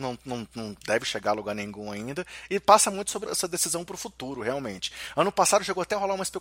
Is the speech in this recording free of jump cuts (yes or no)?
no